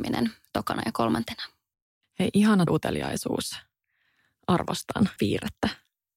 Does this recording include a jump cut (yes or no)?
yes